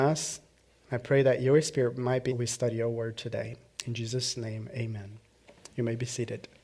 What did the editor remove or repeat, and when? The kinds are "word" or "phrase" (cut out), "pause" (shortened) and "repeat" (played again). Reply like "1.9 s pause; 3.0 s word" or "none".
2.3 s phrase